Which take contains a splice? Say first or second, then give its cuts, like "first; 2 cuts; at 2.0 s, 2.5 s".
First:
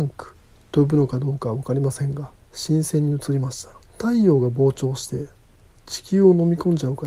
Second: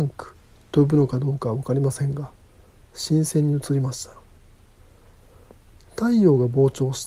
first; 2 cuts; at 2.4 s, 3.8 s